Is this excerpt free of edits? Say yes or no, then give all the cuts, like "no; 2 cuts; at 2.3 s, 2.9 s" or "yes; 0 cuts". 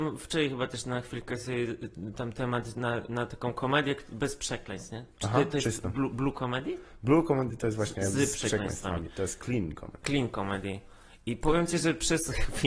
yes; 0 cuts